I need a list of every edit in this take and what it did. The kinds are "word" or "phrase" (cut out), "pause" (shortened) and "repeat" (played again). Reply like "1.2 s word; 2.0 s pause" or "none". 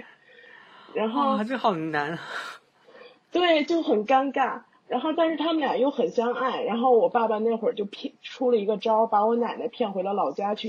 none